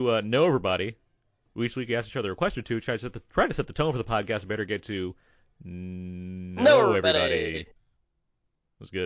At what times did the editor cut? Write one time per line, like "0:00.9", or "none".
none